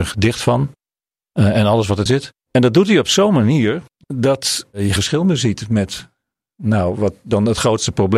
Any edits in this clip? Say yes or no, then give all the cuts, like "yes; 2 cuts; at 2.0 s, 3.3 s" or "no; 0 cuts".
yes; 4 cuts; at 2.1 s, 2.4 s, 3.9 s, 5.0 s